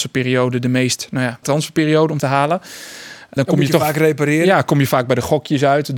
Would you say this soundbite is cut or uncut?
cut